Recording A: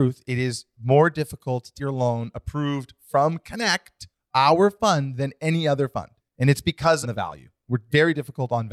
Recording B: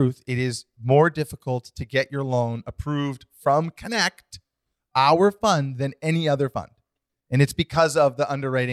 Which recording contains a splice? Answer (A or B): A